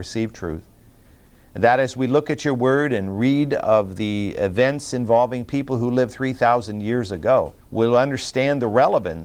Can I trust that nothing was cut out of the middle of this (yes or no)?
no